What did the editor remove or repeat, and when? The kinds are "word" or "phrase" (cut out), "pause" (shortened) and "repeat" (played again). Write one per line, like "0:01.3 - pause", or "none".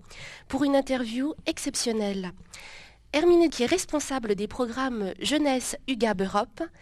0:03.5 - word